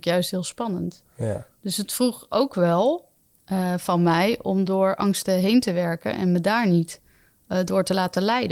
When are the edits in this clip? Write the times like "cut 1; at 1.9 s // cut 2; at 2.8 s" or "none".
none